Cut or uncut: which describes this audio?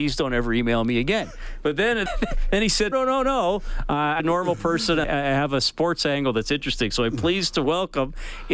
cut